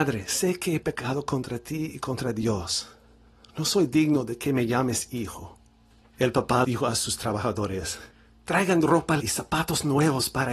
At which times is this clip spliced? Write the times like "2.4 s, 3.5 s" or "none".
6.6 s, 9.2 s